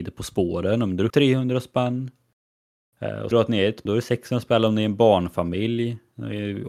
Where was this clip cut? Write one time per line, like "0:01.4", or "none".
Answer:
0:01.1
0:03.3
0:03.9